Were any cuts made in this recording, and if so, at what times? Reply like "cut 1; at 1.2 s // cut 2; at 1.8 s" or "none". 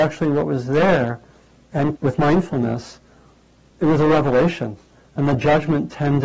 cut 1; at 2.0 s // cut 2; at 3.7 s